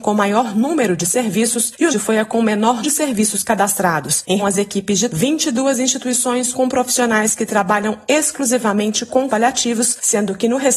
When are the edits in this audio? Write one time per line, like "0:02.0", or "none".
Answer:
0:01.9
0:02.8
0:04.4
0:05.1
0:06.5
0:09.3

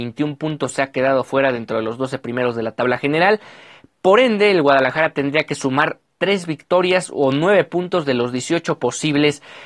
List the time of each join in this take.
none

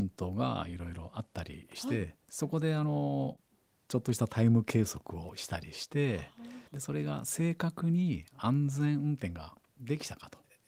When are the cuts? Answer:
0:06.7

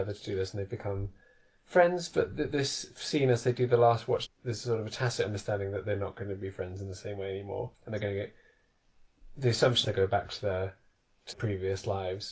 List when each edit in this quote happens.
0:04.3
0:07.7
0:09.8
0:11.3

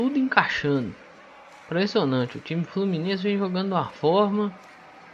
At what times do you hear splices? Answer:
none

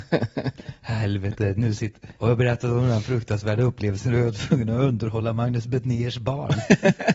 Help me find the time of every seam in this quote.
0:02.2

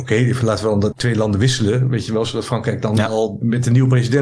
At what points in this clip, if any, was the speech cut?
0:00.9

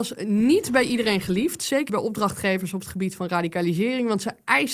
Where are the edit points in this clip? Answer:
0:01.9

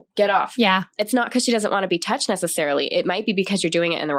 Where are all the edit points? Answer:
none

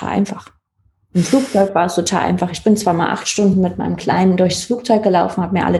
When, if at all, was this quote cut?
none

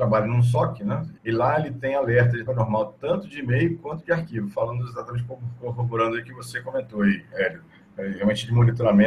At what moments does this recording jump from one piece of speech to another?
0:01.2
0:02.5

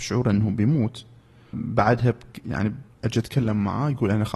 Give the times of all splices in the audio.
0:01.5
0:02.9

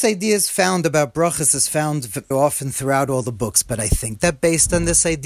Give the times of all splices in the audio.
0:02.3

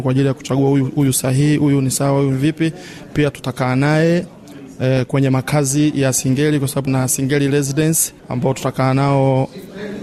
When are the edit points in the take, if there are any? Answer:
0:06.9
0:08.2

